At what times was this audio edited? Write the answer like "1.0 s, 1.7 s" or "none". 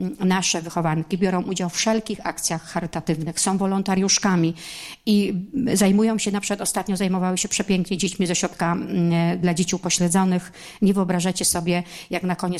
none